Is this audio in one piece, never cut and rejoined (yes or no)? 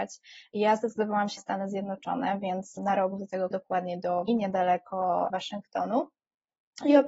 no